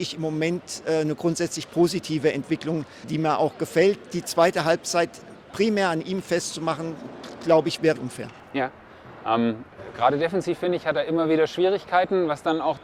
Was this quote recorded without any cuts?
no; 2 cuts; at 3.0 s, 8.0 s

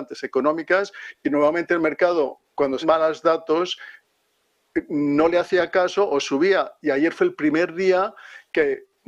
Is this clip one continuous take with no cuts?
no; 1 cut; at 2.8 s

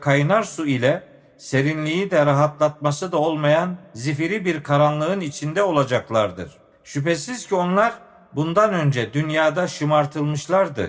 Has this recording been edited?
no; 0 cuts

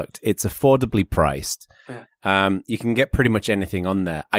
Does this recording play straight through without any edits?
yes; 0 cuts

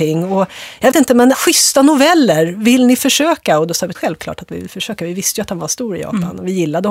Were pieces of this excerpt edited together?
yes; 3 cuts; at 0.9 s, 1.3 s, 3.9 s

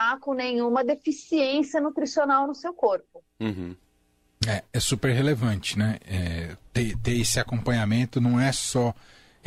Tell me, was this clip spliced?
no; 0 cuts

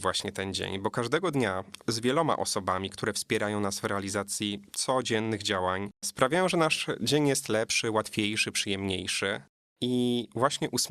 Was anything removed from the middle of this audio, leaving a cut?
yes; 3 cuts; at 1.8 s, 4.7 s, 5.9 s

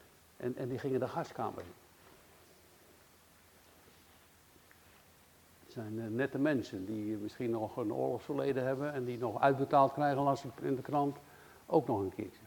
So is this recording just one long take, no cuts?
yes; 0 cuts

